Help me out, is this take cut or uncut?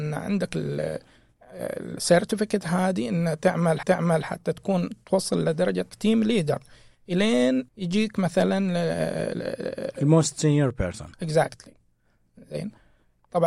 cut